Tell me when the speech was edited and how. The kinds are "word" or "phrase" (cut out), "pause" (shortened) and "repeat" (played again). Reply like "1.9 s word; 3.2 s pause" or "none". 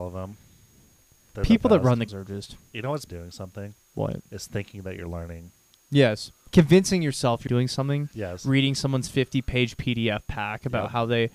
2.1 s word; 3.1 s phrase; 3.8 s pause; 6.5 s pause; 7.5 s word